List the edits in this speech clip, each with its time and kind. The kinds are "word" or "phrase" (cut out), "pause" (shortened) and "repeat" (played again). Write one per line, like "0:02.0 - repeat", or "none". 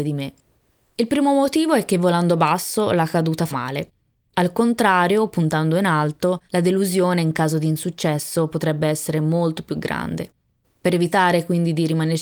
0:03.5 - word
0:06.5 - pause